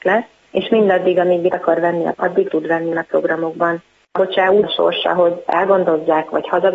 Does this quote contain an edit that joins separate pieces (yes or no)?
yes